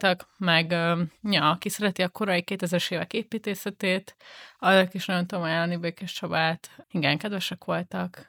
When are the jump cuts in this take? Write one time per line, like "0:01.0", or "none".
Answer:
none